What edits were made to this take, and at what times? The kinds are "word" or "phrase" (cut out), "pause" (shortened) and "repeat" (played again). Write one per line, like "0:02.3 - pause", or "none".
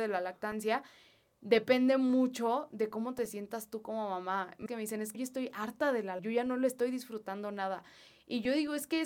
0:04.7 - phrase
0:05.1 - word
0:06.2 - word